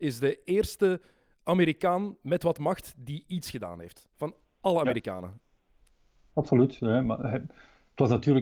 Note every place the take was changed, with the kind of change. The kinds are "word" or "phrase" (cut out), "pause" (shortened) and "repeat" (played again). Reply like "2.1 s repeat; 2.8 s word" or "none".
none